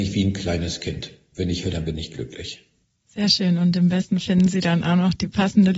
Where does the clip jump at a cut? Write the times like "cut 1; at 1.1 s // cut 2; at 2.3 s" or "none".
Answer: cut 1; at 1.6 s // cut 2; at 4.2 s